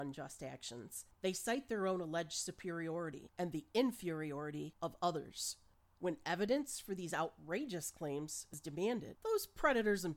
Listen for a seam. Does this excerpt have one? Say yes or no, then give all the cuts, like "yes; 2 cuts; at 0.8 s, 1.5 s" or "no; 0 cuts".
no; 0 cuts